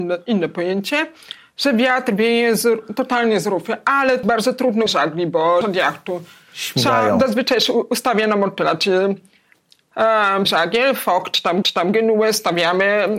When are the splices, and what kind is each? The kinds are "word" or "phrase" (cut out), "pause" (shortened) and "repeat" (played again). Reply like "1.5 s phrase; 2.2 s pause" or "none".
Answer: 4.2 s word; 4.9 s word; 5.6 s phrase; 10.5 s word; 11.6 s repeat